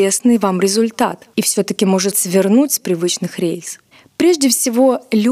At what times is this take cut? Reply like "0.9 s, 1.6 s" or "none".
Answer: 1.3 s, 2.1 s, 3.9 s